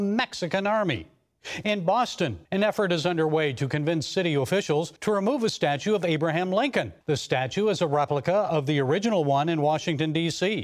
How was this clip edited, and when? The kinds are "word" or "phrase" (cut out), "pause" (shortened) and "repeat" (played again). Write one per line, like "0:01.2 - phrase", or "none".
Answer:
0:02.5 - pause
0:05.0 - pause
0:07.0 - pause